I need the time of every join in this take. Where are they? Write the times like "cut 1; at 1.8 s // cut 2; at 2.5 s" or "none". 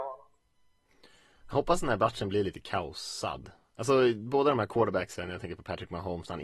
none